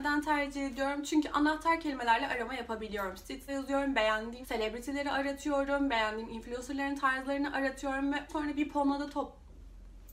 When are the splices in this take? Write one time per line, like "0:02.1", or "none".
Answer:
0:03.5
0:04.4
0:08.3